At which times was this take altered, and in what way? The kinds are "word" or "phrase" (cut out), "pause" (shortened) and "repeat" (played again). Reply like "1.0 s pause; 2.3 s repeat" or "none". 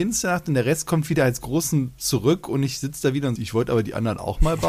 2.0 s word; 3.4 s phrase